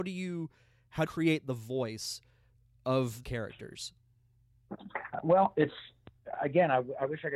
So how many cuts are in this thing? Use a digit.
2